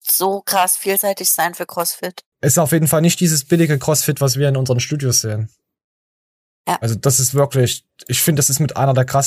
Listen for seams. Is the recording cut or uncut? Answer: cut